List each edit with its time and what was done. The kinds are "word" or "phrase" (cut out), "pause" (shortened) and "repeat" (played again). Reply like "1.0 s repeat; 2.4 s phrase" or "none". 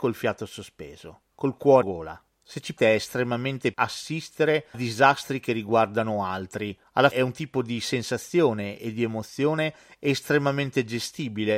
1.8 s word; 2.8 s word; 3.7 s word; 4.7 s word; 7.1 s word